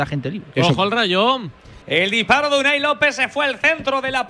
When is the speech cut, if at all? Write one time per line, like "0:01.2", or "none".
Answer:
0:01.8

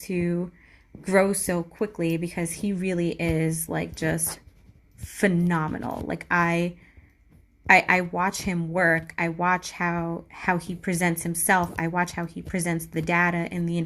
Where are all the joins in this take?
none

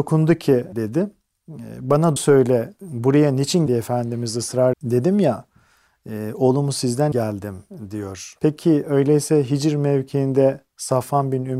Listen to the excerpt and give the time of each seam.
0:02.2
0:03.7
0:04.7
0:07.1

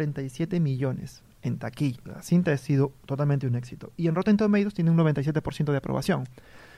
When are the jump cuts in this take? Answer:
0:02.0

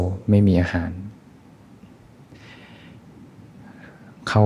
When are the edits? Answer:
none

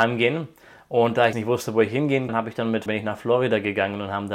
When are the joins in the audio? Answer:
0:01.3
0:02.3
0:02.9

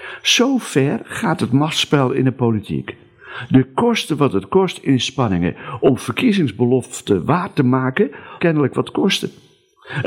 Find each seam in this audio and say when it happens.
0:08.4

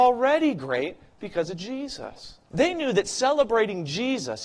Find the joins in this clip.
0:02.4

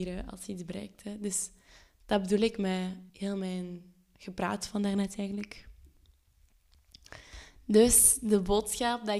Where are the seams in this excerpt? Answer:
0:03.1

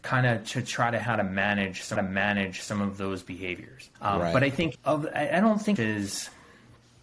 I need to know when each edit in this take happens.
0:01.0
0:02.0
0:03.9
0:04.7
0:05.8

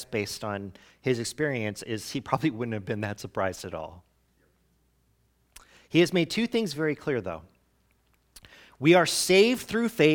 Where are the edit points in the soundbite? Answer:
none

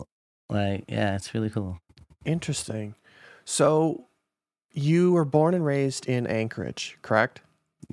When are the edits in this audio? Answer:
none

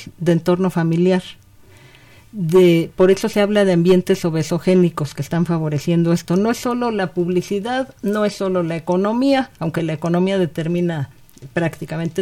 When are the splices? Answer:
none

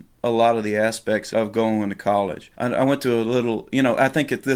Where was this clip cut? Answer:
0:01.3
0:02.5

